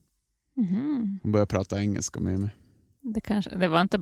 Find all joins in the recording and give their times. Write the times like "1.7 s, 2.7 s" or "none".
none